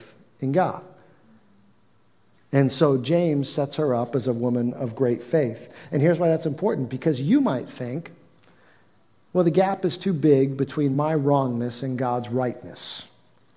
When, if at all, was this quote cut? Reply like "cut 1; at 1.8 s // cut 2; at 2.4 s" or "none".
none